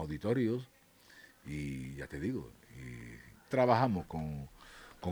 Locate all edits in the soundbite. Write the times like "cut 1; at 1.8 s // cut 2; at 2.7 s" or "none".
cut 1; at 3.5 s

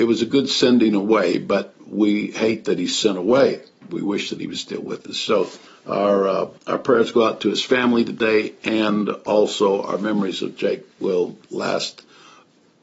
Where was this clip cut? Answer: cut 1; at 5.7 s // cut 2; at 6.6 s

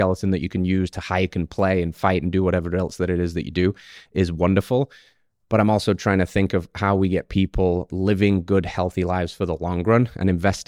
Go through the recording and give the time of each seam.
none

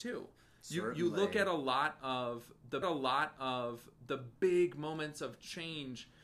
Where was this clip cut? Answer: cut 1; at 2.8 s

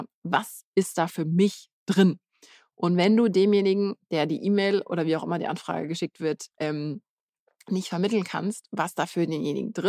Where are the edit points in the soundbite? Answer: cut 1; at 6.5 s

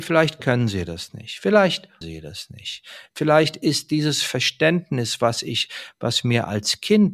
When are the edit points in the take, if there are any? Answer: cut 1; at 2.0 s

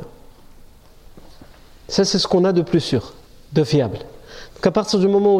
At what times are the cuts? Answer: cut 1; at 3.3 s

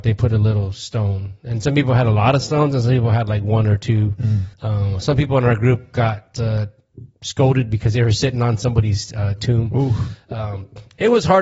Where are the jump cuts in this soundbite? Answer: cut 1; at 4.5 s // cut 2; at 7.1 s

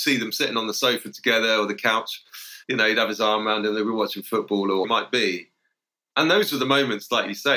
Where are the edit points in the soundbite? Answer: cut 1; at 2.6 s // cut 2; at 4.8 s

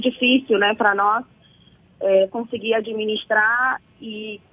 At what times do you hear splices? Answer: none

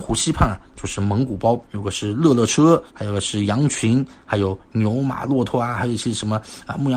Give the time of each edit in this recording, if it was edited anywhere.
cut 1; at 1.7 s // cut 2; at 2.9 s

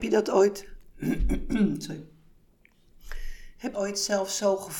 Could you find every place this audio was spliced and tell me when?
cut 1; at 3.7 s

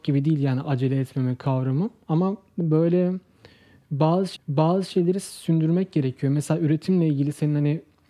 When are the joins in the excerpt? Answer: cut 1; at 4.4 s

